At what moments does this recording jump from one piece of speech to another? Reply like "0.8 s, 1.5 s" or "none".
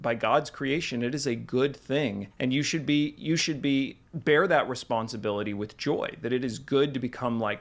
2.3 s, 4.0 s